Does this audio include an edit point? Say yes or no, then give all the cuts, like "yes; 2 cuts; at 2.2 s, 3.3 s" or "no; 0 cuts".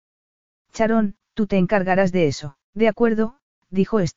yes; 2 cuts; at 1.2 s, 2.6 s